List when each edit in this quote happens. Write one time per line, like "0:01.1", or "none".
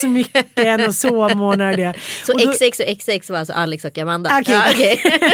none